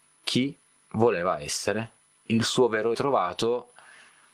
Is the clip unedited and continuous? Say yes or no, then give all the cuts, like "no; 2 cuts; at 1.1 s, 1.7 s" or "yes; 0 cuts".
no; 2 cuts; at 2.0 s, 2.9 s